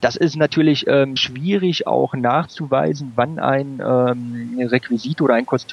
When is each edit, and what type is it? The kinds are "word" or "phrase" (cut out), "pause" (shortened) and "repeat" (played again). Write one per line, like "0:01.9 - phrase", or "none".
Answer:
0:01.2 - word